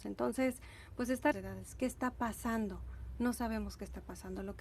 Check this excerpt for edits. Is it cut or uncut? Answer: cut